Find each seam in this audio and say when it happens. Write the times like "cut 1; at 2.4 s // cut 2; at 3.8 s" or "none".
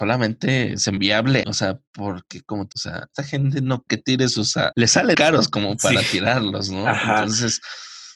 cut 1; at 1.0 s // cut 2; at 1.4 s // cut 3; at 2.7 s // cut 4; at 3.1 s // cut 5; at 3.9 s // cut 6; at 4.7 s // cut 7; at 5.1 s